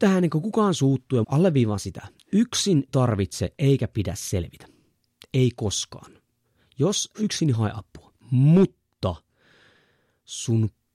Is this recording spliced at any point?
yes; 4 cuts; at 1.2 s, 2.9 s, 7.1 s, 8.2 s

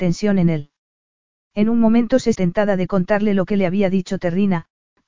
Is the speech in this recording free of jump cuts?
no; 1 cut; at 2.3 s

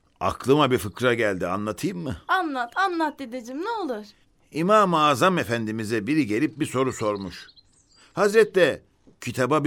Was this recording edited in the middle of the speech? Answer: no; 0 cuts

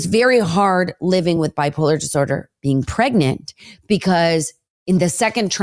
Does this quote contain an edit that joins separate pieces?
no; 0 cuts

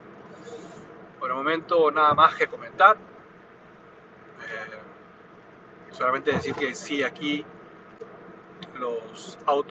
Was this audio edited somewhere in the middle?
no; 0 cuts

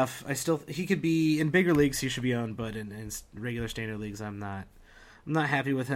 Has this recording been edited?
no; 0 cuts

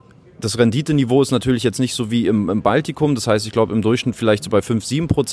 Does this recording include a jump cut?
no; 0 cuts

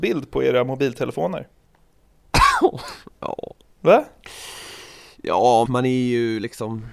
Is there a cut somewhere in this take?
yes; 1 cut; at 5.7 s

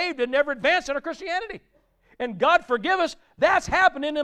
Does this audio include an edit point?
no; 0 cuts

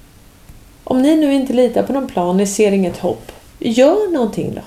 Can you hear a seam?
no; 0 cuts

